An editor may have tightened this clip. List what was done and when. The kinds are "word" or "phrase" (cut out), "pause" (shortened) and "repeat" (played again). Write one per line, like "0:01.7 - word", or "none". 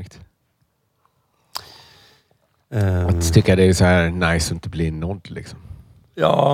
none